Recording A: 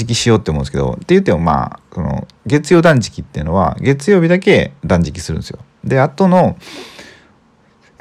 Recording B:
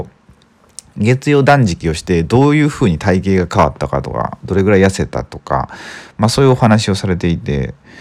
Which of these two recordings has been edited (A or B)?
A